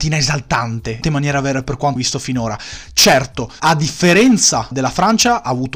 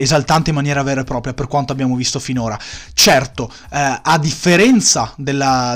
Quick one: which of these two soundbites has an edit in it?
first; 5 cuts; at 1.0 s, 1.6 s, 2.0 s, 3.6 s, 4.7 s

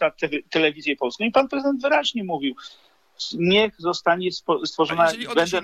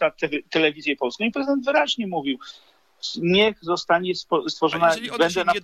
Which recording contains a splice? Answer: second; 1 cut; at 1.3 s

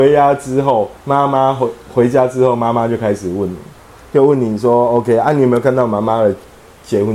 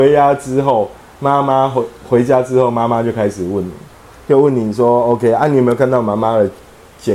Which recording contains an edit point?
first; 1 cut; at 1.0 s

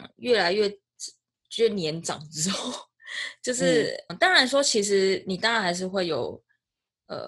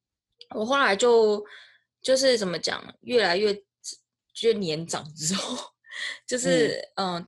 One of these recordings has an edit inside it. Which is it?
first; 1 cut; at 4.1 s

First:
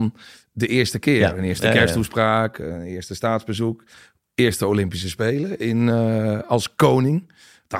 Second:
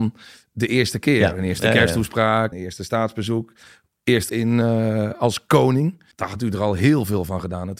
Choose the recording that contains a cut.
second; 3 cuts; at 2.5 s, 4.3 s, 6.1 s

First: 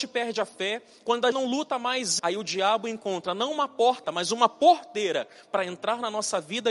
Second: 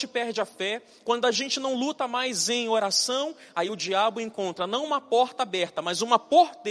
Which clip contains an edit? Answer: first; 3 cuts; at 1.3 s, 2.2 s, 4.0 s

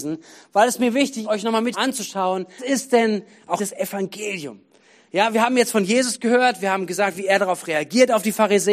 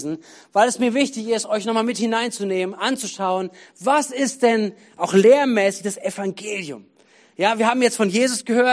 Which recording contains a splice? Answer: first; 4 cuts; at 1.2 s, 1.7 s, 2.6 s, 3.6 s

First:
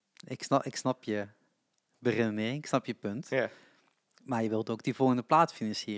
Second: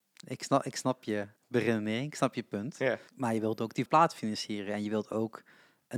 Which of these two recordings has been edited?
second; 3 cuts; at 1.4 s, 3.1 s, 3.9 s

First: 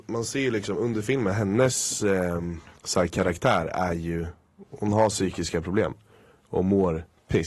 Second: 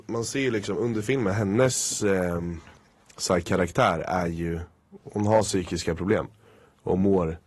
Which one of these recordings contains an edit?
first; 1 cut; at 2.8 s

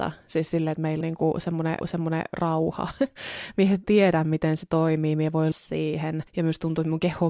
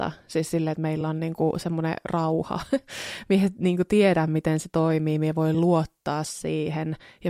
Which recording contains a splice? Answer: first; 5 cuts; at 1.0 s, 1.8 s, 3.8 s, 5.5 s, 6.3 s

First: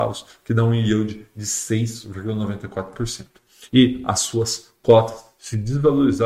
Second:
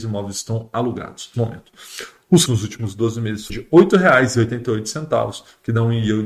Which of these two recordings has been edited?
second; 3 cuts; at 1.3 s, 2.5 s, 3.5 s

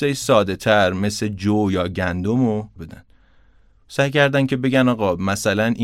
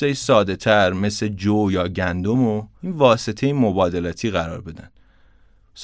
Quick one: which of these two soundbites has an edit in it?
first; 1 cut; at 2.8 s

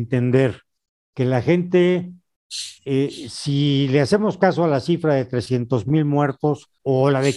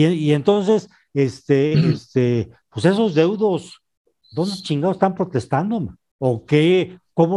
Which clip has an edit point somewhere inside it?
first; 1 cut; at 2.8 s

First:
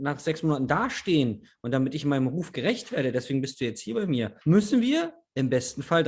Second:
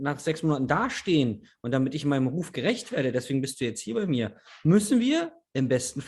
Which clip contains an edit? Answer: first; 1 cut; at 4.4 s

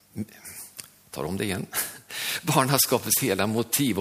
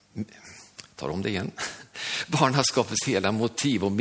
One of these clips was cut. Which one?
second; 1 cut; at 0.9 s

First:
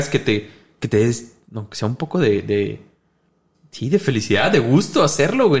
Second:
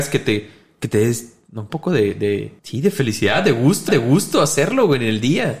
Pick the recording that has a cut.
second; 3 cuts; at 1.7 s, 2.6 s, 3.9 s

